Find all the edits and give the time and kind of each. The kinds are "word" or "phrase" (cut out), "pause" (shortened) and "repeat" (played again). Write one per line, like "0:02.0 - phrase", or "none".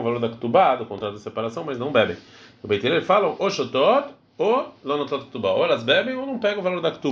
none